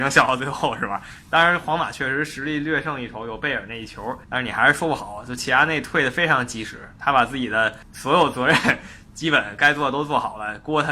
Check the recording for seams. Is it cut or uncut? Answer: cut